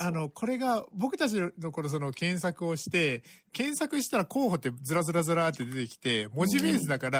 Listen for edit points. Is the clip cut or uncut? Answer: uncut